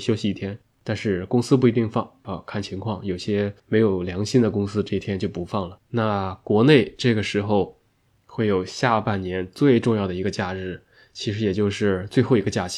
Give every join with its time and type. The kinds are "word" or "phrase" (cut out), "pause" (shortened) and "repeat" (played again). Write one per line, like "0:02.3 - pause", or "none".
0:05.8 - pause